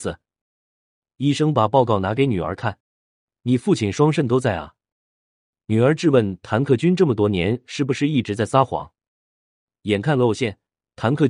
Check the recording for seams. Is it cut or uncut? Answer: cut